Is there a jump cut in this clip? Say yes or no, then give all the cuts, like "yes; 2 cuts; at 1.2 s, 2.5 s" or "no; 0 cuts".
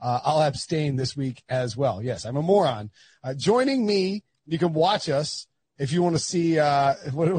no; 0 cuts